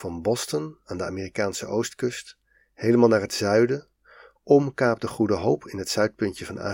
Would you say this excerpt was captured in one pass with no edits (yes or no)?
yes